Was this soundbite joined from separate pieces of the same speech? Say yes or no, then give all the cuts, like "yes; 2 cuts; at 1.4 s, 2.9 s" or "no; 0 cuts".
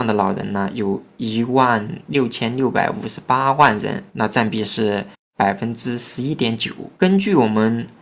yes; 2 cuts; at 4.1 s, 6.9 s